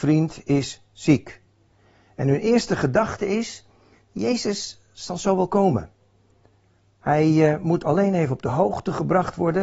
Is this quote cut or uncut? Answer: uncut